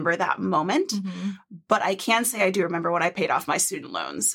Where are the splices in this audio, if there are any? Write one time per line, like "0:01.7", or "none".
none

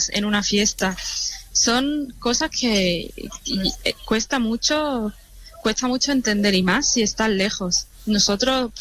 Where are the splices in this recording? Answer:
none

